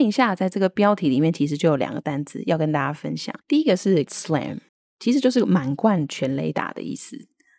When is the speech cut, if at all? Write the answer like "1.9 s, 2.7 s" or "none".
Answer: 3.4 s, 4.1 s, 4.7 s